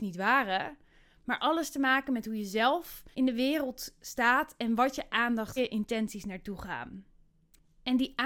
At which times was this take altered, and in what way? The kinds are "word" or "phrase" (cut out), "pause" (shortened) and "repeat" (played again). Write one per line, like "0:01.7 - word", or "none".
0:03.1 - pause
0:05.6 - phrase